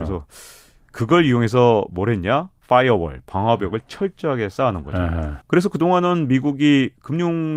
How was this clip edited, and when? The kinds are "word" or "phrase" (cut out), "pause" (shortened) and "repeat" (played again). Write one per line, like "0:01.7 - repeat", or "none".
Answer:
0:05.4 - pause